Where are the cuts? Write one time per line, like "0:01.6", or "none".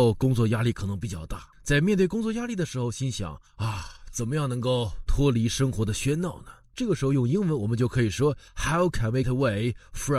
0:01.5
0:03.5
0:08.5
0:09.2